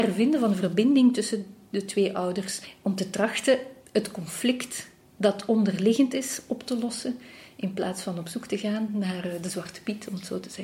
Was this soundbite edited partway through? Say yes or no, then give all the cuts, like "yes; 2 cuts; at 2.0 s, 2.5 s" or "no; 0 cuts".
no; 0 cuts